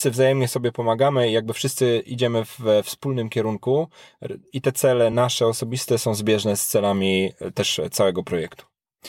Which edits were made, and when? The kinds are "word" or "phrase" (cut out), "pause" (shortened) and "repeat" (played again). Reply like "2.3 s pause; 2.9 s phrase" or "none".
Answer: none